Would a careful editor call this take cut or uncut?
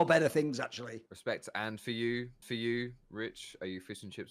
cut